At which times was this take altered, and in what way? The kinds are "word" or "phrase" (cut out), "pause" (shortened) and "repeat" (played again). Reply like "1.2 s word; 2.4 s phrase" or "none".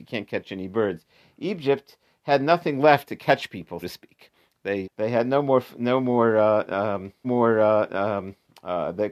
3.8 s word; 4.8 s word; 7.2 s repeat